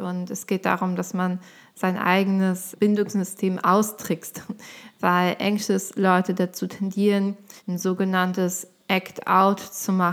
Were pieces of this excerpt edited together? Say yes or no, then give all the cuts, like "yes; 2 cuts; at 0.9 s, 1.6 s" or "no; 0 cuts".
yes; 2 cuts; at 2.7 s, 7.6 s